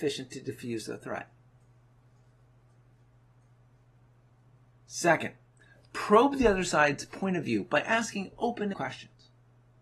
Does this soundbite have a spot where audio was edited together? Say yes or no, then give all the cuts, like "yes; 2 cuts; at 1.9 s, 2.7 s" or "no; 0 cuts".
yes; 1 cut; at 8.7 s